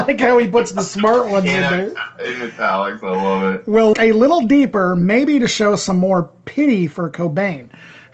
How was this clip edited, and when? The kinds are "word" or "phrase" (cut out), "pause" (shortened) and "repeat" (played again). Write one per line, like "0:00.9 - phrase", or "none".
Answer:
0:03.9 - word